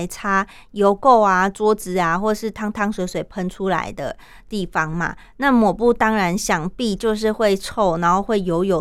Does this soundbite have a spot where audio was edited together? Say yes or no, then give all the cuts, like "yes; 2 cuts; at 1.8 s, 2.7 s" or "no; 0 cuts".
no; 0 cuts